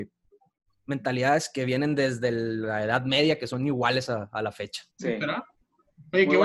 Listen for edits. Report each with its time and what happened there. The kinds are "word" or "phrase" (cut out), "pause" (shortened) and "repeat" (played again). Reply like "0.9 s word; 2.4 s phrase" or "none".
4.9 s pause